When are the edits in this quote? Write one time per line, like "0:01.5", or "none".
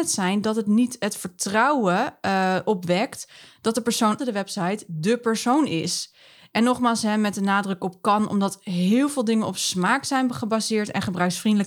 0:04.2